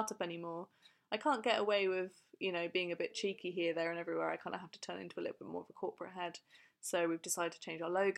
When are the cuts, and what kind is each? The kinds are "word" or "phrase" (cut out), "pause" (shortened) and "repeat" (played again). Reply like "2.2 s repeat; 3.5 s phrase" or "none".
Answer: none

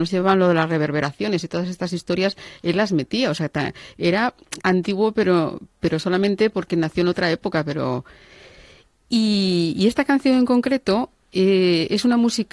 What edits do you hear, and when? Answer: 4.6 s word

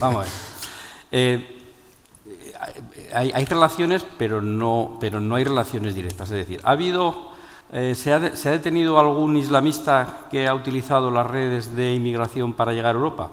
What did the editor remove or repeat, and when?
7.6 s pause

